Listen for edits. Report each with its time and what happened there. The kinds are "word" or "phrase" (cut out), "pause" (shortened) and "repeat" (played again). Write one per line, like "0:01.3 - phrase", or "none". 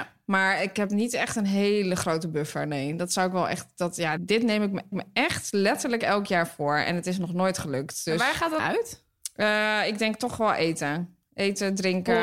0:04.2 - word
0:04.9 - repeat
0:08.6 - phrase